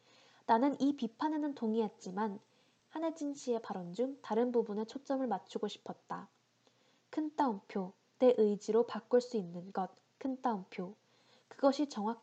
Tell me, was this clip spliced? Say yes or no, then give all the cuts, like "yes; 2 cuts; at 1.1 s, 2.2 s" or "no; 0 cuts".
no; 0 cuts